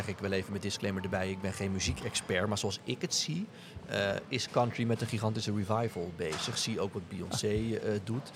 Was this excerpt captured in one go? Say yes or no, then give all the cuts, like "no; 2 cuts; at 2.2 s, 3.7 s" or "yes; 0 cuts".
yes; 0 cuts